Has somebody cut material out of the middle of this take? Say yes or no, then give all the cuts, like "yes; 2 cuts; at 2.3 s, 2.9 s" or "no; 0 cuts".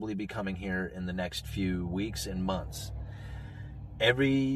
no; 0 cuts